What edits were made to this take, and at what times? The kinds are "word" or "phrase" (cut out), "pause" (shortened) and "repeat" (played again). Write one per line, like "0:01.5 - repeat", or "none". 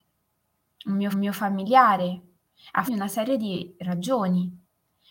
0:01.1 - repeat
0:02.9 - word